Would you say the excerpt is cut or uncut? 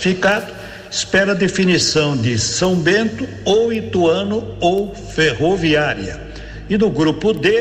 uncut